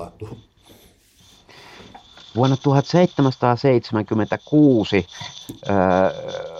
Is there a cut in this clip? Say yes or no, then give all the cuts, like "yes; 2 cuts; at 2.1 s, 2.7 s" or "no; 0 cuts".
no; 0 cuts